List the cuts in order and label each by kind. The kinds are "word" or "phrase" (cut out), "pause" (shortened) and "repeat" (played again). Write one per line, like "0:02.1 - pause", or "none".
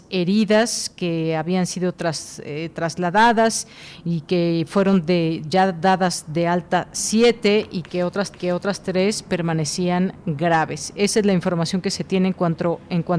0:08.3 - repeat